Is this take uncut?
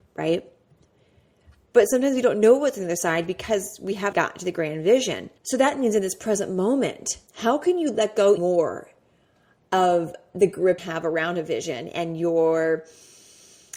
no; 5 cuts; at 4.1 s, 5.4 s, 7.3 s, 8.4 s, 10.8 s

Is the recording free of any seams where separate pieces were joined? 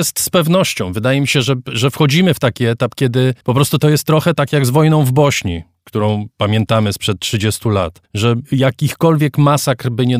no; 2 cuts; at 3.4 s, 8.1 s

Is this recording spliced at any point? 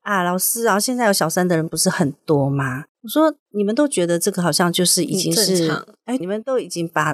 yes; 1 cut; at 6.2 s

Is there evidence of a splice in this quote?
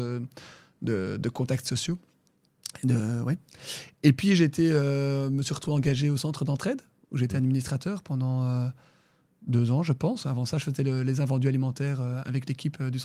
no; 0 cuts

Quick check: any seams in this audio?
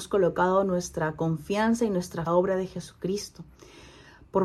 yes; 1 cut; at 2.3 s

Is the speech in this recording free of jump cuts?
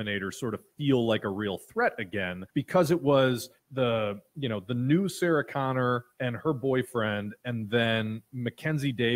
no; 2 cuts; at 2.5 s, 3.6 s

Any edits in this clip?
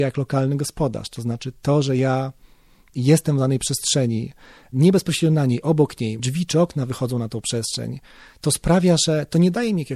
yes; 1 cut; at 6.2 s

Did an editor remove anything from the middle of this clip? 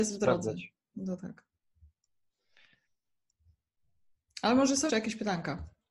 yes; 2 cuts; at 1.2 s, 4.9 s

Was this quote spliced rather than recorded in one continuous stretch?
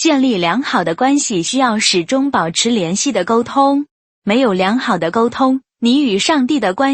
no; 0 cuts

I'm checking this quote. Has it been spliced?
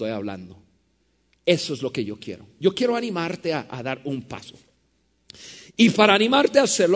no; 0 cuts

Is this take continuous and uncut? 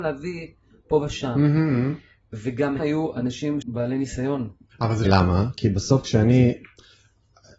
no; 4 cuts; at 2.8 s, 3.6 s, 4.7 s, 5.1 s

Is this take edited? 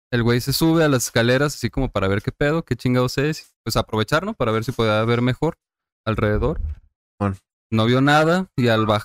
yes; 1 cut; at 3.4 s

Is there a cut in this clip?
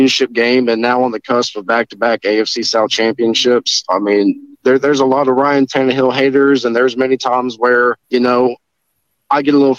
yes; 2 cuts; at 4.5 s, 8.0 s

